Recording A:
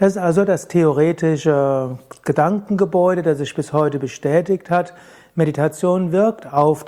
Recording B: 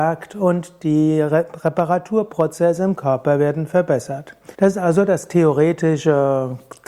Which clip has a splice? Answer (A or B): B